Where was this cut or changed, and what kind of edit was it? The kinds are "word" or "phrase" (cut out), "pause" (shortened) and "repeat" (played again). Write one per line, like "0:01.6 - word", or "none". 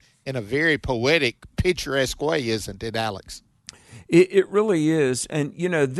none